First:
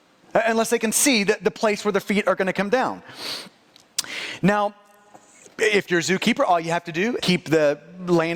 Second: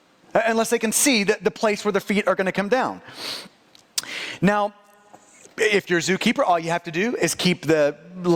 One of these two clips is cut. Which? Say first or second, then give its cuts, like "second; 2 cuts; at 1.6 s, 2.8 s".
first; 1 cut; at 7.2 s